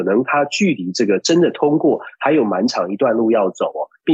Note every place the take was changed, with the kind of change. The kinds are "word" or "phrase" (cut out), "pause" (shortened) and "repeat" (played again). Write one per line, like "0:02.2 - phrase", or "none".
none